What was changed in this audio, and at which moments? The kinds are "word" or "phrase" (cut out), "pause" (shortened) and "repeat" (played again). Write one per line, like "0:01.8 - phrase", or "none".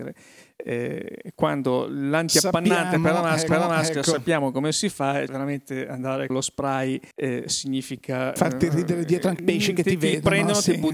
0:03.5 - repeat
0:05.3 - word
0:06.3 - word
0:07.1 - pause
0:09.4 - word